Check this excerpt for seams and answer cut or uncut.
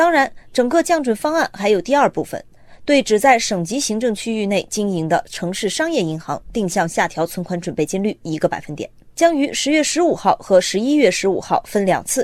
uncut